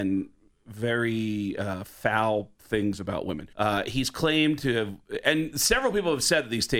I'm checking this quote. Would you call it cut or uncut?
cut